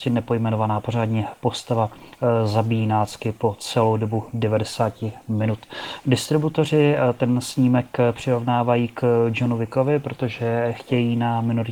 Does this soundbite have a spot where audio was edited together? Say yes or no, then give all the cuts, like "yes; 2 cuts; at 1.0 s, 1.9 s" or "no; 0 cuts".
no; 0 cuts